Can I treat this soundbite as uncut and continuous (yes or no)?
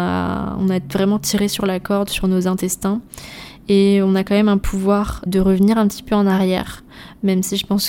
no